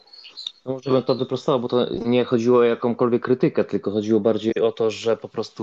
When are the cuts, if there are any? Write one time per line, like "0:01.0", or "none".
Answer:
none